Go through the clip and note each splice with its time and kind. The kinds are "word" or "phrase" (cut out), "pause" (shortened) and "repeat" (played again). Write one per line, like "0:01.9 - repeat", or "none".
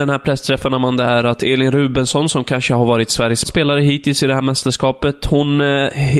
0:03.4 - word